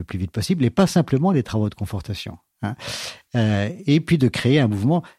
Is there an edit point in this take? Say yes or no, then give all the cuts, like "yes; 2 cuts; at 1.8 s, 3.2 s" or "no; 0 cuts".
no; 0 cuts